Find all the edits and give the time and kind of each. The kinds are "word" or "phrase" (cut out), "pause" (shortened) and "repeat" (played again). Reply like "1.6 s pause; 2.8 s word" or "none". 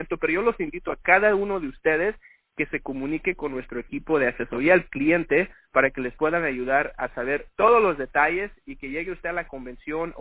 none